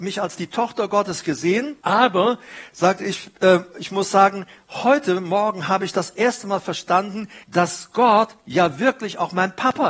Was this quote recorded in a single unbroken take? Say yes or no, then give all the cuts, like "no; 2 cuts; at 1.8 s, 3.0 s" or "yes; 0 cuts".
no; 2 cuts; at 1.8 s, 7.4 s